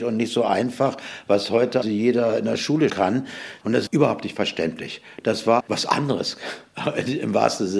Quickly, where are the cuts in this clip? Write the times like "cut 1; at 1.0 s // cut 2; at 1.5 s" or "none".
cut 1; at 1.8 s // cut 2; at 2.9 s // cut 3; at 3.9 s // cut 4; at 5.6 s